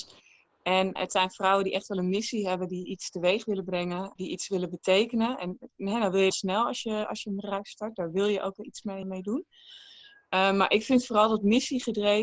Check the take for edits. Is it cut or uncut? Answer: cut